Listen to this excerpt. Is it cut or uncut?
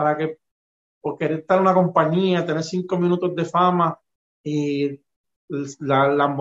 uncut